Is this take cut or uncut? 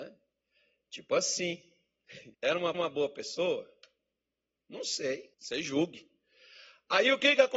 cut